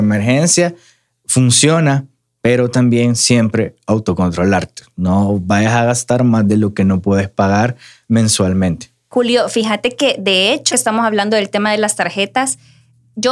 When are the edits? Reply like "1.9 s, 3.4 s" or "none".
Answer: 10.7 s